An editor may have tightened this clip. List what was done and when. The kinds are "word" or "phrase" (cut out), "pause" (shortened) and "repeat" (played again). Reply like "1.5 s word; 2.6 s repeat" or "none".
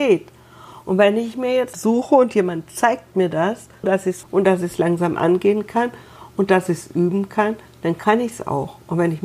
1.7 s phrase; 3.8 s word; 4.2 s phrase